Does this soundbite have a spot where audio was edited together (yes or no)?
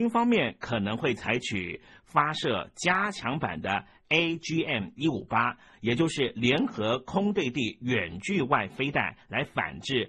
no